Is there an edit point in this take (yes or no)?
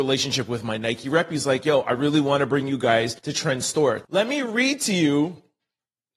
yes